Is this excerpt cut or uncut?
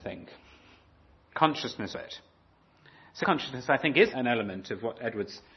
cut